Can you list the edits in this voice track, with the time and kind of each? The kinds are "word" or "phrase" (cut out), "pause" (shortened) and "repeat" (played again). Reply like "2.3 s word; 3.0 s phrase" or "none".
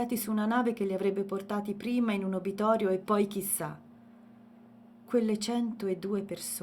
none

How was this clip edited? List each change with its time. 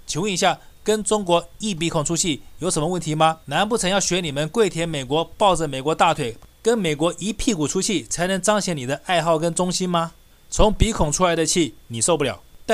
3.4 s pause

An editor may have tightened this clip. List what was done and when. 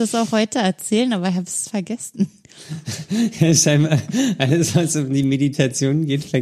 none

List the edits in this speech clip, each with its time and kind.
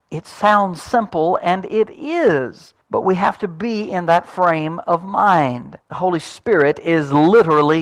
2.8 s pause; 5.8 s pause

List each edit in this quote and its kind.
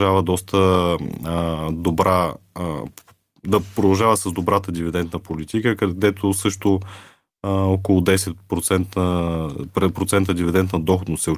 none

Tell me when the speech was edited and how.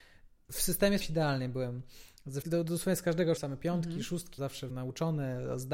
1.0 s word; 2.4 s word; 3.4 s word; 4.4 s word; 4.7 s word

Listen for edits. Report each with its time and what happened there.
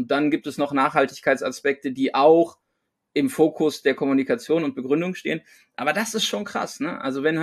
none

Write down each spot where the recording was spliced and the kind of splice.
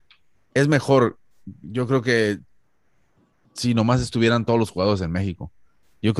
none

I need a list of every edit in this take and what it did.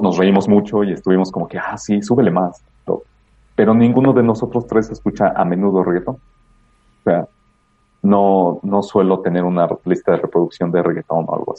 none

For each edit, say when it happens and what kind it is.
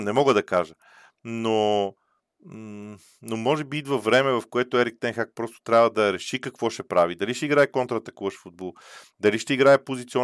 none

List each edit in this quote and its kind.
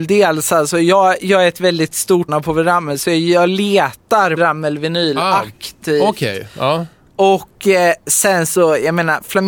2.3 s word; 4.4 s word

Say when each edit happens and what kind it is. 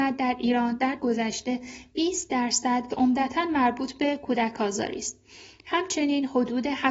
1.0 s phrase; 2.9 s phrase

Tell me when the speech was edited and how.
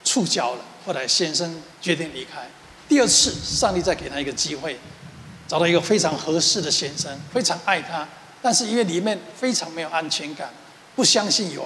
1.7 s pause

